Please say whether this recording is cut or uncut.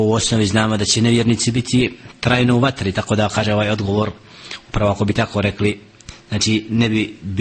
uncut